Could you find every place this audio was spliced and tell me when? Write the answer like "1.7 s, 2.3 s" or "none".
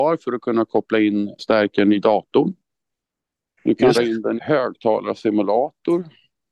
1.4 s, 3.9 s, 4.4 s